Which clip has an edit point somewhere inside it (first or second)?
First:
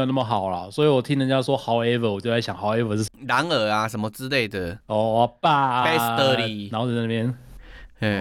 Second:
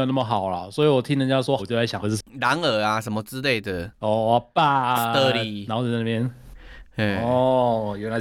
second